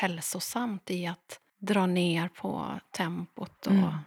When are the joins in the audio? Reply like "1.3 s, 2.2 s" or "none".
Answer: 1.5 s